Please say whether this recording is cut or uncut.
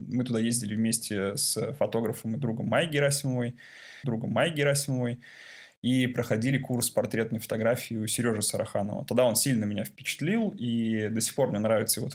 cut